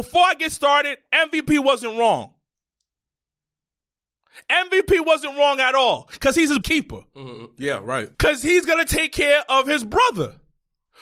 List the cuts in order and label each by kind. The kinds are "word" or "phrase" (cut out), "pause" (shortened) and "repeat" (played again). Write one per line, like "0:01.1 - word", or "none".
0:06.6 - word
0:08.1 - pause